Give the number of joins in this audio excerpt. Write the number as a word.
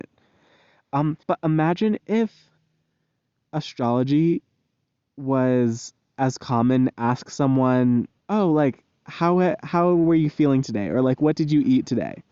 three